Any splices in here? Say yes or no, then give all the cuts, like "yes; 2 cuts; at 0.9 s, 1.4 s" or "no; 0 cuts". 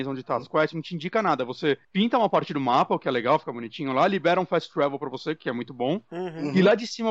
no; 0 cuts